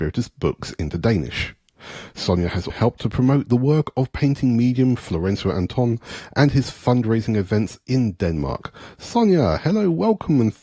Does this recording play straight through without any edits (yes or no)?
no